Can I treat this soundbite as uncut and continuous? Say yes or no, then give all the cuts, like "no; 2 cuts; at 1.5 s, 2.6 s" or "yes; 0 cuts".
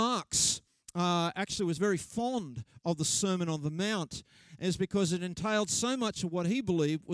yes; 0 cuts